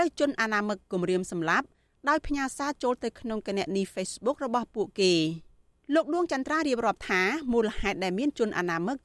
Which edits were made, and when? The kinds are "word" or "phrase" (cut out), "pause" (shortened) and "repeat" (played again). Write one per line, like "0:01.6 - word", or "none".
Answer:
none

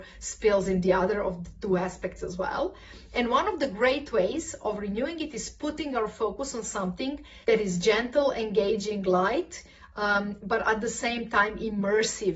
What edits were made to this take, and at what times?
0:07.4 - pause

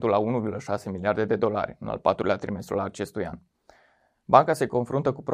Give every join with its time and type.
none

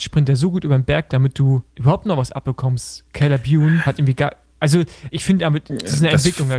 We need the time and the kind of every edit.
0:01.1 - word
0:01.7 - pause
0:03.8 - word
0:05.1 - word

